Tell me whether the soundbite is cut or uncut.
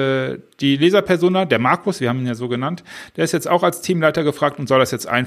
uncut